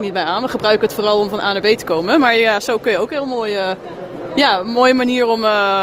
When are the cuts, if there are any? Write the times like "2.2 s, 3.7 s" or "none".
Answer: none